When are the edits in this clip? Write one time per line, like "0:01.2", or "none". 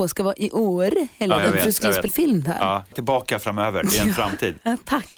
0:01.4
0:02.1
0:02.9